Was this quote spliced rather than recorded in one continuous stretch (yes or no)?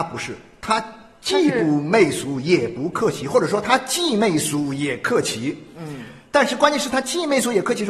no